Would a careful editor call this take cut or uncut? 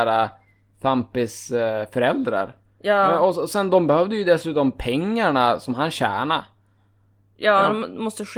uncut